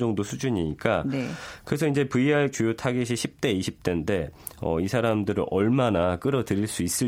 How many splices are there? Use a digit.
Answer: 1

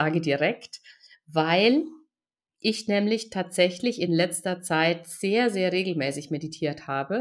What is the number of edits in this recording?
0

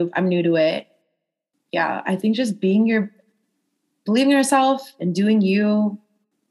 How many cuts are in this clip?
0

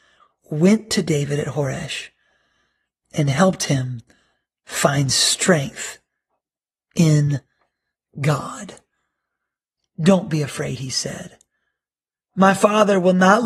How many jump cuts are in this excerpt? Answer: 0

